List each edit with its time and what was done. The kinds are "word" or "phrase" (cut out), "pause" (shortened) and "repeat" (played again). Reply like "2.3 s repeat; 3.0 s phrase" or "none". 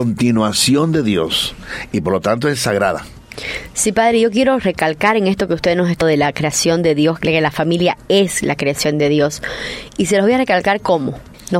6.0 s word